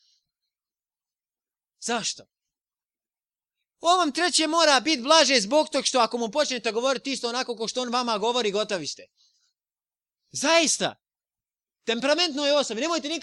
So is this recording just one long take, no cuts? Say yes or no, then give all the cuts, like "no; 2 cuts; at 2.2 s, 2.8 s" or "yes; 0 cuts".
yes; 0 cuts